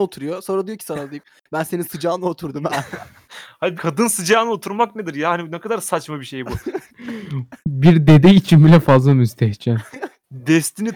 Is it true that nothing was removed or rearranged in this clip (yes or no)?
no